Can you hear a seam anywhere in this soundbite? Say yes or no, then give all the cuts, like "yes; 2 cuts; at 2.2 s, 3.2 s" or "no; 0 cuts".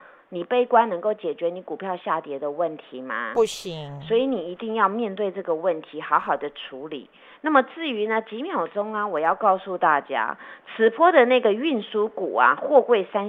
no; 0 cuts